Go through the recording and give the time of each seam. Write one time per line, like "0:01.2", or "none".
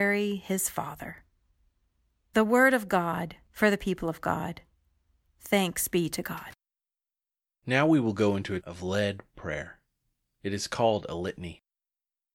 0:08.6